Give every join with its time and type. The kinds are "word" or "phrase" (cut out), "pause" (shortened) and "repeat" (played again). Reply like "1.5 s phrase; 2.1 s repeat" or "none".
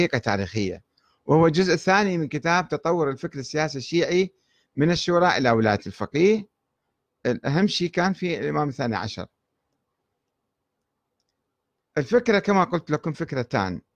none